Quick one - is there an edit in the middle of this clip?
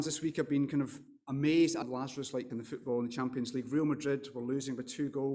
yes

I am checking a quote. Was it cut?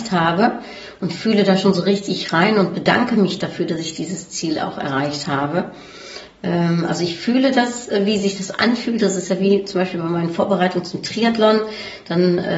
no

